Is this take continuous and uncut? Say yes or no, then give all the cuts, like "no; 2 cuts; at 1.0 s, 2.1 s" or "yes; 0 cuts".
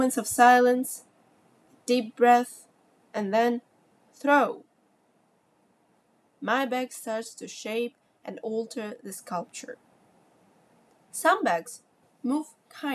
yes; 0 cuts